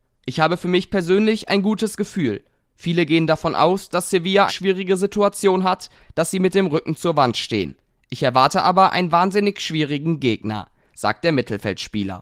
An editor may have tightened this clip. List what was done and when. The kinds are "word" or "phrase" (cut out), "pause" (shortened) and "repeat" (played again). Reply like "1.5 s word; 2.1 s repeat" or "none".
4.5 s word